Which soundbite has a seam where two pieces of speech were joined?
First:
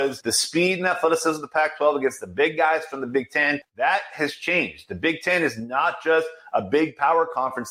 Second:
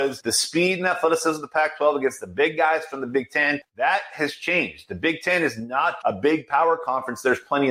second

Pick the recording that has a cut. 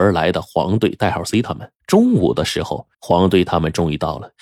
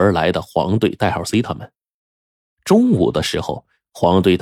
first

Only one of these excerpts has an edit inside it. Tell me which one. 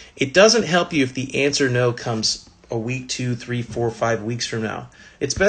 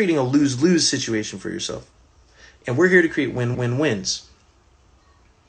second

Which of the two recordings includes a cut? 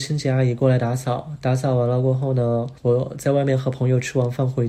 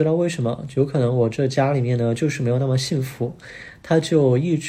first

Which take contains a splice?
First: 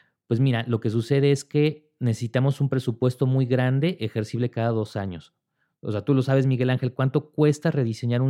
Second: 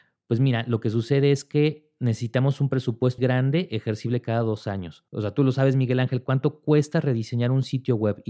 second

